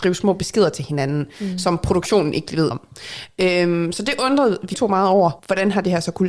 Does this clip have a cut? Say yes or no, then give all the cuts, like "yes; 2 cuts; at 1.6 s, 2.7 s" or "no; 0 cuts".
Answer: yes; 3 cuts; at 2.7 s, 4.7 s, 5.4 s